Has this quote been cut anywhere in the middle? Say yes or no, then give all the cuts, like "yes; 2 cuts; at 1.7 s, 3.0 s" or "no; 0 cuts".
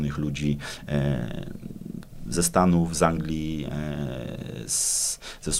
no; 0 cuts